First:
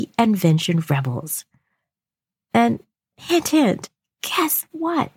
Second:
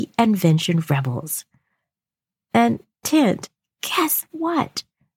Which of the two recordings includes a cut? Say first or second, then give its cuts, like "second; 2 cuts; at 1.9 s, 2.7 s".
second; 1 cut; at 3.0 s